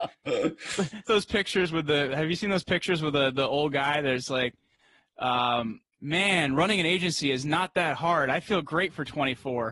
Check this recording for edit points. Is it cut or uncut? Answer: cut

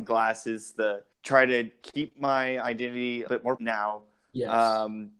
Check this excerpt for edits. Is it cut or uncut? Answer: cut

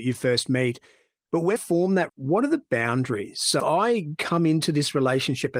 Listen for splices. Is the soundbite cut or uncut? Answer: cut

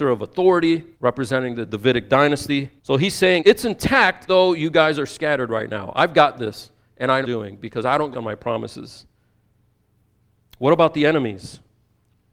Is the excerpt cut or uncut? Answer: cut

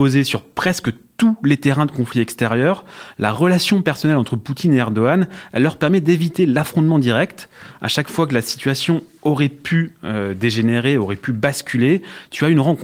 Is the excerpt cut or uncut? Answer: uncut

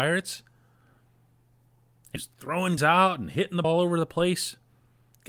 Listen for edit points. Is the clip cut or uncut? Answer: cut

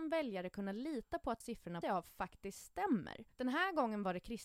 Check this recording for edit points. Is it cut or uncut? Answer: cut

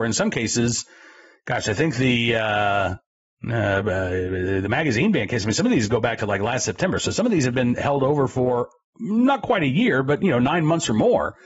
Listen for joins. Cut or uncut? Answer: uncut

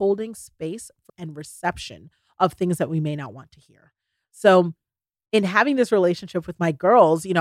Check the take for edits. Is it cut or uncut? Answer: cut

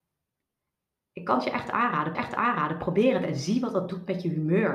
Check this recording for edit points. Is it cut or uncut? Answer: cut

